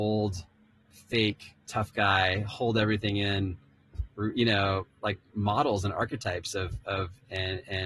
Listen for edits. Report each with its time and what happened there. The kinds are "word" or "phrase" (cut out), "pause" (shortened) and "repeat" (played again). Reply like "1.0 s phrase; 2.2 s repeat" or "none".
1.6 s pause